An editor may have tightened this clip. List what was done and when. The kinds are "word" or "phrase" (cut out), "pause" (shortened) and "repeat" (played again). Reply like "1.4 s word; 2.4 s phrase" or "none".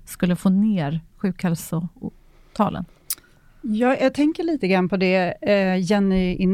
none